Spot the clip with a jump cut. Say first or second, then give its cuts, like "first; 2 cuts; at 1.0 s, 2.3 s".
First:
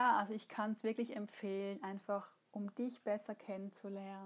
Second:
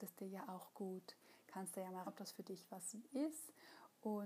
second; 1 cut; at 2.0 s